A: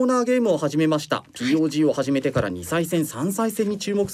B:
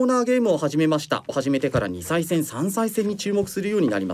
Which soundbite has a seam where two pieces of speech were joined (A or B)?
B